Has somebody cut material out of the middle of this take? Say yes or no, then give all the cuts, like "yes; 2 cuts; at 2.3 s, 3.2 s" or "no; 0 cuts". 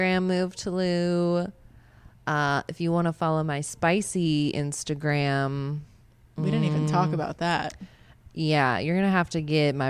yes; 1 cut; at 2.1 s